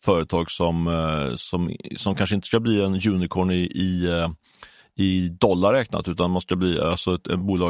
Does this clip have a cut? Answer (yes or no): no